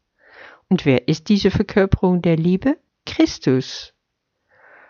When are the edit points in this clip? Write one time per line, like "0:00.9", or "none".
0:02.9